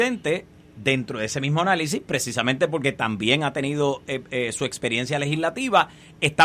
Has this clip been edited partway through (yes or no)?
no